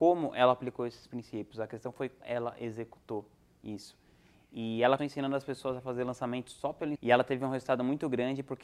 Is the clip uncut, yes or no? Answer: no